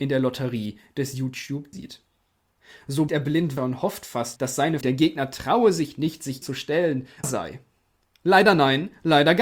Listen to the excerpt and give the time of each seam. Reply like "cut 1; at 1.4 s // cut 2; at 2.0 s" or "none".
cut 1; at 1.7 s // cut 2; at 3.1 s // cut 3; at 3.6 s // cut 4; at 4.4 s // cut 5; at 4.8 s // cut 6; at 6.4 s // cut 7; at 7.2 s